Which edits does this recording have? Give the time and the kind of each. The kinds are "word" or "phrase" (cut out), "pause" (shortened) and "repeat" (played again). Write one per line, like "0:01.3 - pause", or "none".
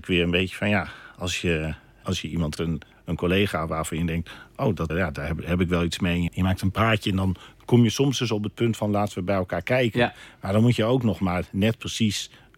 0:02.6 - word
0:04.9 - word
0:06.3 - phrase